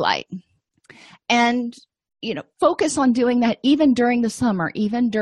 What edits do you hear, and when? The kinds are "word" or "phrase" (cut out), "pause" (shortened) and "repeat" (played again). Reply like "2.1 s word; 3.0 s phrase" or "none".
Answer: 2.5 s pause